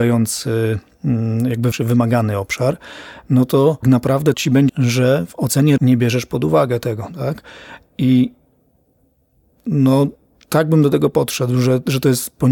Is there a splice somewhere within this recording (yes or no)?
yes